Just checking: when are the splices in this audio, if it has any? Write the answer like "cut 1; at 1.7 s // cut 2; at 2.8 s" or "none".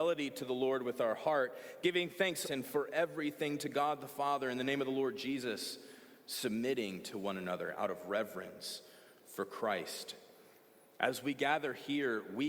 cut 1; at 2.4 s